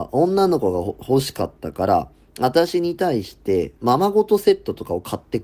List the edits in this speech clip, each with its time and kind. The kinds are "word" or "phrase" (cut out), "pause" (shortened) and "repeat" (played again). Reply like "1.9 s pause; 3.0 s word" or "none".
3.8 s word